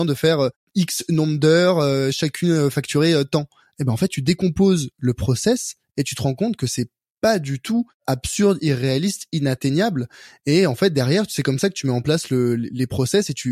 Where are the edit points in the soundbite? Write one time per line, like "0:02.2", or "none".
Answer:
none